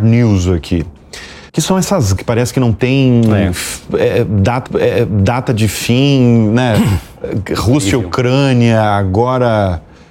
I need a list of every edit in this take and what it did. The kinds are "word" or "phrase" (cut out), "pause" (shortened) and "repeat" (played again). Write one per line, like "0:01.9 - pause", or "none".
0:01.5 - pause
0:02.2 - word
0:04.7 - repeat